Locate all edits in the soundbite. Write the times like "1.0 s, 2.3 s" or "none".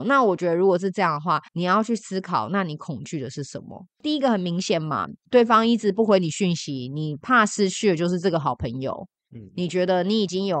1.5 s